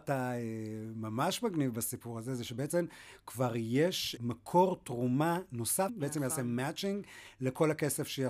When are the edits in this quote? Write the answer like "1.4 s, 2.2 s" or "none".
4.2 s, 5.9 s